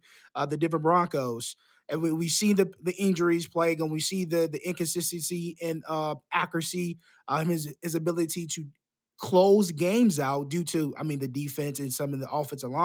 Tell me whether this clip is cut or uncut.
uncut